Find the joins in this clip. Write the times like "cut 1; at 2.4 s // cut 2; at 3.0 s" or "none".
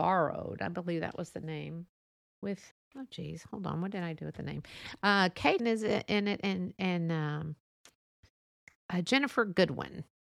cut 1; at 2.7 s // cut 2; at 5.6 s